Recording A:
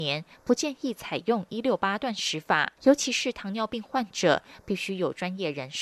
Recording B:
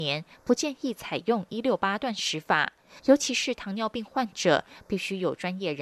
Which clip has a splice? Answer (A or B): A